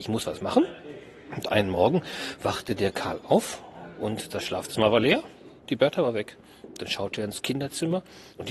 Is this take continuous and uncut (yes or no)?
no